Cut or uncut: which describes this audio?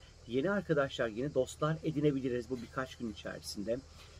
uncut